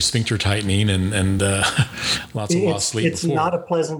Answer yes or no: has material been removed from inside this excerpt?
no